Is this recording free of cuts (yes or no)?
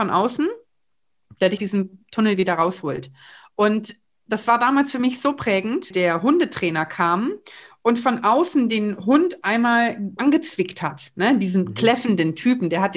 no